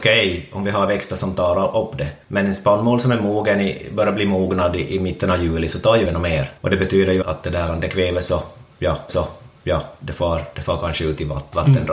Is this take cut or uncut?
cut